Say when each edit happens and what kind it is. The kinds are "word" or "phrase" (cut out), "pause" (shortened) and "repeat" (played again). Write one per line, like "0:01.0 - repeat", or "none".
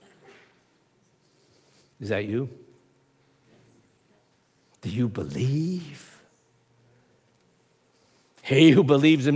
none